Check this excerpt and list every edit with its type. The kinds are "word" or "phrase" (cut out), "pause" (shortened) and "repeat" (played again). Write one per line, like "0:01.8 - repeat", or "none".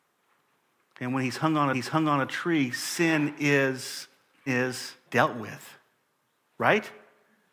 0:01.7 - repeat
0:04.5 - word
0:05.0 - pause